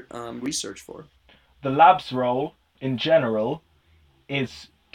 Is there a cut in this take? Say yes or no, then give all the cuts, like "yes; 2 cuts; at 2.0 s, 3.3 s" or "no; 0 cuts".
no; 0 cuts